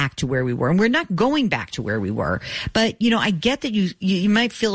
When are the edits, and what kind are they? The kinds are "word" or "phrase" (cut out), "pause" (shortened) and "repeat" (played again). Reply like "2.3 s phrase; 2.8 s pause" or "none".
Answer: none

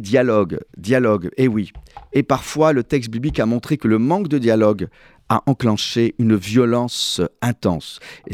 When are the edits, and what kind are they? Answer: none

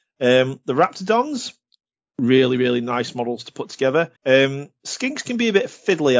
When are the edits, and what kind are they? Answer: 4.2 s pause

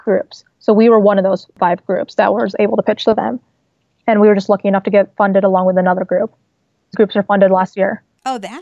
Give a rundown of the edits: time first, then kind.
6.9 s word

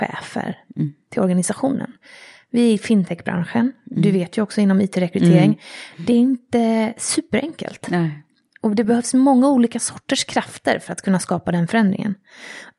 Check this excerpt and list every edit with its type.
none

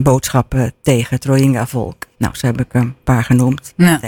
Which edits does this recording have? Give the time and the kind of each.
2.1 s pause

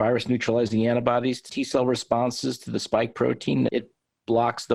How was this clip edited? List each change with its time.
1.5 s word; 3.7 s word

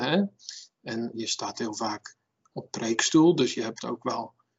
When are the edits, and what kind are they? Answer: 1.1 s word; 2.7 s word

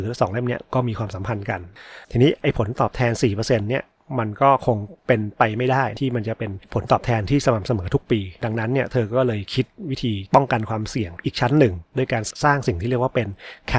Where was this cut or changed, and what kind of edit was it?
2.0 s pause

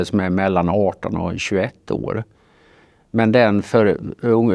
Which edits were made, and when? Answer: none

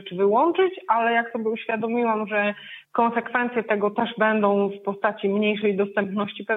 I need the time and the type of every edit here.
2.9 s pause

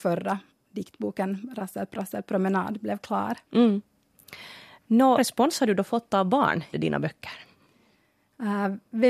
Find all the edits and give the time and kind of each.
3.5 s pause; 5.2 s phrase; 6.7 s word

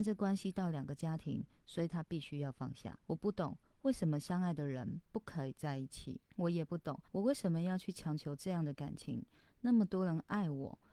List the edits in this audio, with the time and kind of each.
3.0 s pause; 6.3 s pause; 7.1 s pause

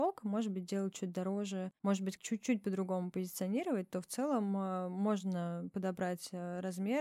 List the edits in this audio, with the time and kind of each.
2.2 s word

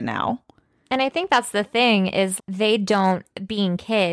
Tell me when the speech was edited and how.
2.4 s word

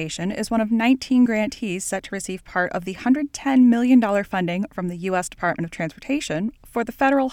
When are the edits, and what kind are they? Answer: none

